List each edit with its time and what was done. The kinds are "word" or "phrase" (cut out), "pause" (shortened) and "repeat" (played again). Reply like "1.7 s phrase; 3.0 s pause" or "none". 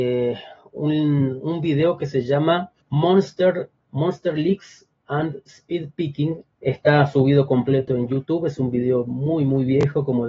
2.8 s pause; 6.5 s pause